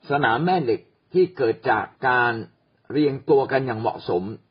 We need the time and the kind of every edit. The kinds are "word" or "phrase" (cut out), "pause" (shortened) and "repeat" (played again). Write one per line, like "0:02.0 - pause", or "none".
0:02.0 - pause
0:02.5 - pause

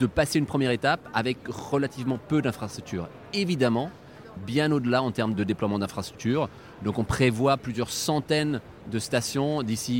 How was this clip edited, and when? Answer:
0:04.4 - phrase
0:05.3 - word

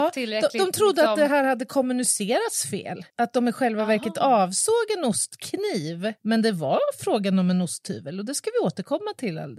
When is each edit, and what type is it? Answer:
0:03.1 - pause
0:06.2 - pause

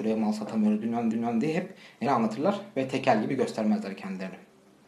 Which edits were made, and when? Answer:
0:01.1 - repeat
0:02.1 - word

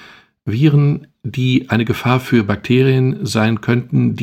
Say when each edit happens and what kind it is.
none

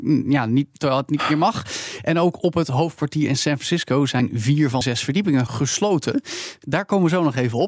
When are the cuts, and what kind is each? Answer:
0:04.8 - word
0:05.5 - word

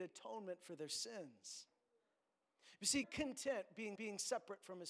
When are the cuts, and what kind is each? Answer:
0:03.0 - phrase
0:04.0 - repeat

